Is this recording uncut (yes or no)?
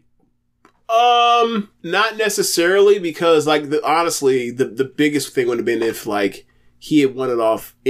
no